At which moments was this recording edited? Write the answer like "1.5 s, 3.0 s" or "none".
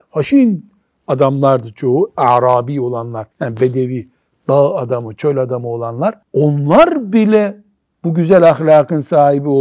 3.3 s, 6.2 s